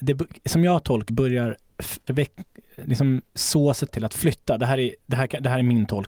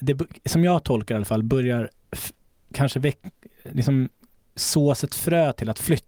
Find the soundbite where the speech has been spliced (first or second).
first